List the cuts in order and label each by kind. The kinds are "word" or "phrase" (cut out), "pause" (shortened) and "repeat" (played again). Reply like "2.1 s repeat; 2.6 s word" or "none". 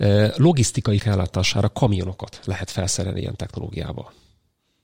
1.0 s word